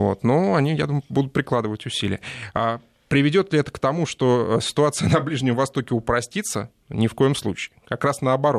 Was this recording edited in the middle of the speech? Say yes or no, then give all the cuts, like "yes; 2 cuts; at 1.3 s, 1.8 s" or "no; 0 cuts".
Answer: no; 0 cuts